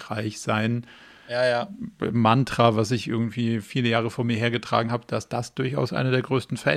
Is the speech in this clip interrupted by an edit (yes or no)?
no